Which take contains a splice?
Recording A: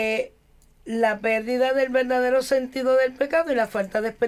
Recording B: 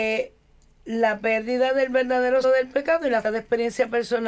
B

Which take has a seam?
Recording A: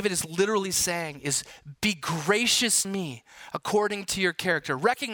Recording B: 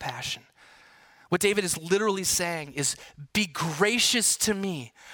A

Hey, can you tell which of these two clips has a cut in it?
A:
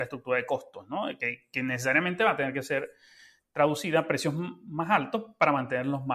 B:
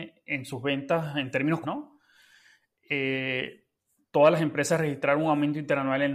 B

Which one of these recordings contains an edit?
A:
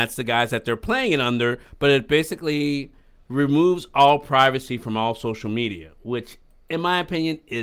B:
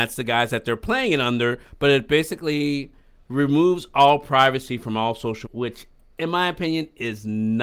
B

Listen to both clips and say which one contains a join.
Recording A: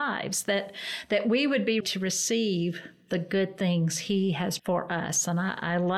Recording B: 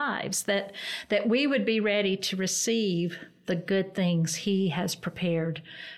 A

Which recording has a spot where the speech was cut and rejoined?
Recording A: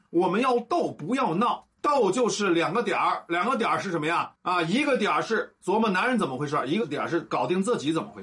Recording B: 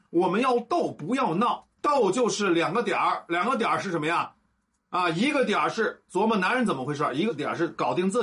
A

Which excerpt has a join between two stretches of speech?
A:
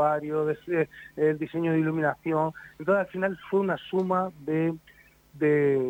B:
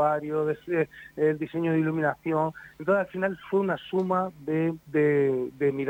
B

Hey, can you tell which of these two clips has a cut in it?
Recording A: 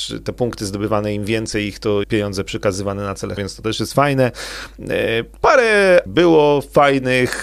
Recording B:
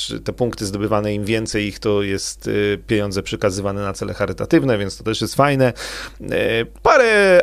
A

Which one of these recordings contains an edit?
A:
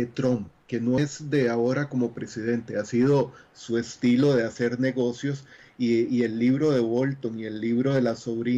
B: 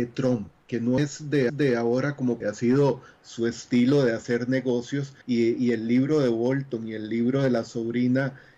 B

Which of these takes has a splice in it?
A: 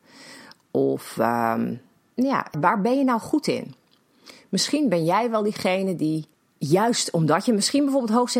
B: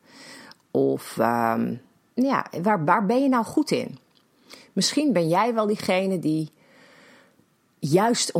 A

